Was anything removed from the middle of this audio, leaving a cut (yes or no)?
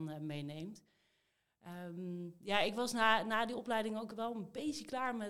no